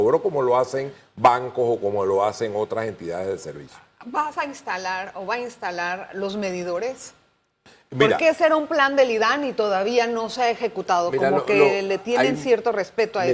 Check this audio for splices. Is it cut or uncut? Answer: uncut